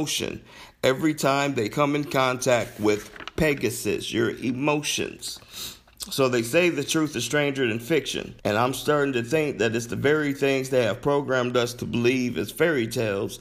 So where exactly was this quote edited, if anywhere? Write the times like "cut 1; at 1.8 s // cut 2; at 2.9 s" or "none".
cut 1; at 8.4 s